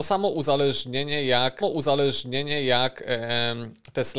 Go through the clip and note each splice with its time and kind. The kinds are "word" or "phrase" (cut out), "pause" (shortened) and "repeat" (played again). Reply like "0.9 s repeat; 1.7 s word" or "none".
1.6 s repeat